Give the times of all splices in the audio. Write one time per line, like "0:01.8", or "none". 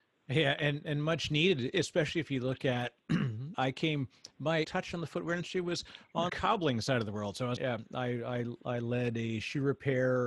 0:03.5
0:04.6
0:06.3
0:07.6